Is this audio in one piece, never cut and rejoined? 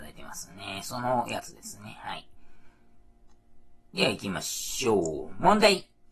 no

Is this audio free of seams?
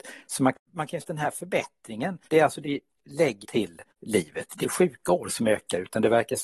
no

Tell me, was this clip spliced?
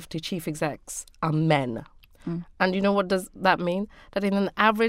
no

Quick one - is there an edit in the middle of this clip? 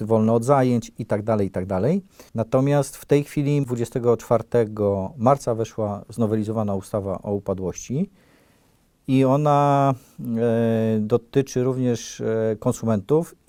yes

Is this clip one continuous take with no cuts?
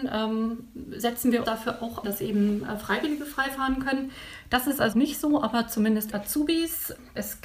no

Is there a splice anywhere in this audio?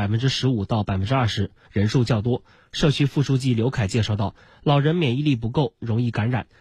no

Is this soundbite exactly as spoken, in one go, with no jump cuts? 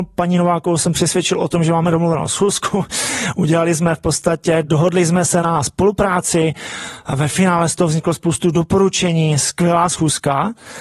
yes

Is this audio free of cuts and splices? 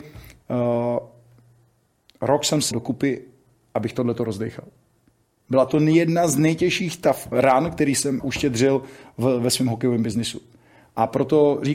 no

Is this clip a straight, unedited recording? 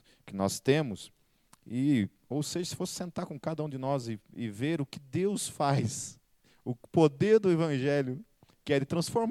yes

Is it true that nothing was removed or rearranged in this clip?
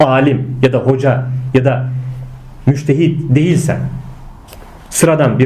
yes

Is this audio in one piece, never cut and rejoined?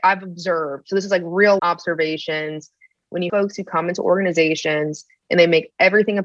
no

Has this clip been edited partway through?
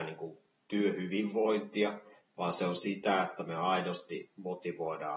no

